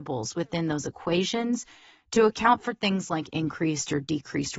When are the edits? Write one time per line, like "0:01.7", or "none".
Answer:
none